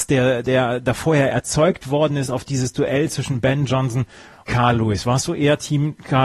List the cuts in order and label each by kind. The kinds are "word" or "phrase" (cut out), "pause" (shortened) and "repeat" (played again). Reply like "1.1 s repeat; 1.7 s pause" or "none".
4.5 s word